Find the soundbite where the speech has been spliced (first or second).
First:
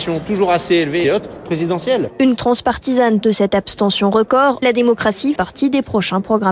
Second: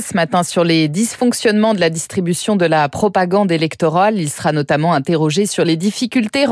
first